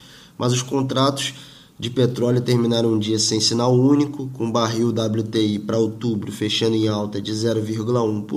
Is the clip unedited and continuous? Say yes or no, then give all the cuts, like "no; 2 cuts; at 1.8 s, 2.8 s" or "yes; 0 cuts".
yes; 0 cuts